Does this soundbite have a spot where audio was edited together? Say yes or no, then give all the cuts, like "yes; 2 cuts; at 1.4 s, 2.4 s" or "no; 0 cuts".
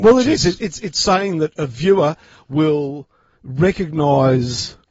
no; 0 cuts